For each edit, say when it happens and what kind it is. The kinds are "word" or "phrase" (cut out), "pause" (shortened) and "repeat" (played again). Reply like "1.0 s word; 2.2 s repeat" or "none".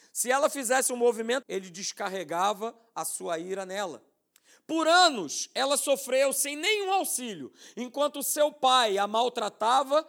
1.4 s word

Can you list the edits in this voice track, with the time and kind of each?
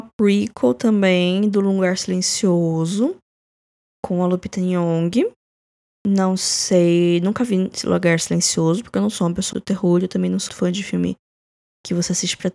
9.5 s word; 10.5 s word

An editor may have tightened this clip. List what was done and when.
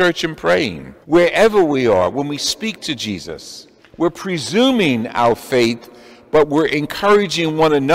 1.0 s pause; 3.8 s pause

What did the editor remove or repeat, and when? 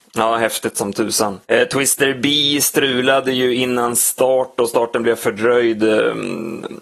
1.4 s pause

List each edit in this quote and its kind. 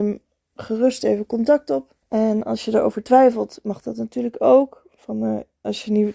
2.0 s pause

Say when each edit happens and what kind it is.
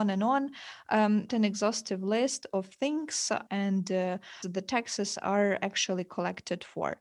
1.3 s phrase; 3.5 s word; 4.4 s word

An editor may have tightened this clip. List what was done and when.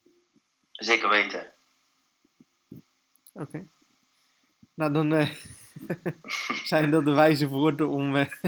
none

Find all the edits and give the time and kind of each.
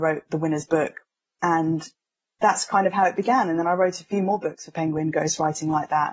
none

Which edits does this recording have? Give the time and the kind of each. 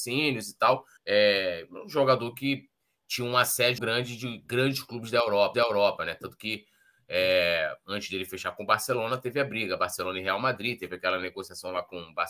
1.0 s pause; 3.8 s word; 5.5 s repeat

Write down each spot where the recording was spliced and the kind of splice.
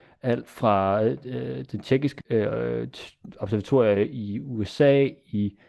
2.2 s word

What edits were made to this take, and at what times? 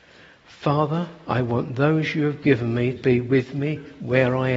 3.0 s word

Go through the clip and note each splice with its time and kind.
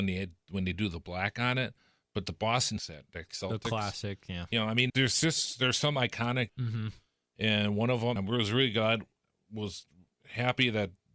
2.8 s word; 3.3 s word; 4.9 s word; 6.5 s word; 8.2 s word

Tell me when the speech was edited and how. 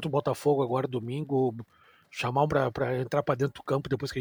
2.5 s word

